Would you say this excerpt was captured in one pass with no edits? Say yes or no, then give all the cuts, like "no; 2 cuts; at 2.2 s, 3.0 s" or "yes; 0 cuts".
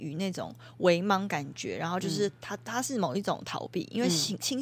yes; 0 cuts